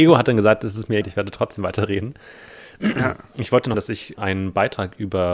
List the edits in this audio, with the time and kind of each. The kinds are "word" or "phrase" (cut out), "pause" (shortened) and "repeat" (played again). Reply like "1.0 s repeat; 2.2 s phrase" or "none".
1.0 s word; 3.7 s word; 4.2 s word